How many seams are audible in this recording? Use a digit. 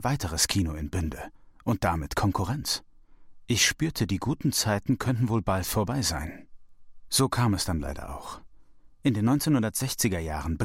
0